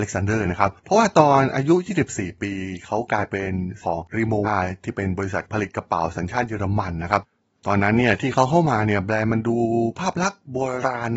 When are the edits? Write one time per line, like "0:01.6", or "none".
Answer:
0:03.8
0:04.4